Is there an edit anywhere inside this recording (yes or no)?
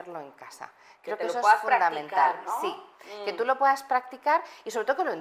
no